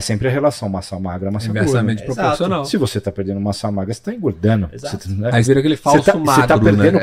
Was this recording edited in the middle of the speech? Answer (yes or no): yes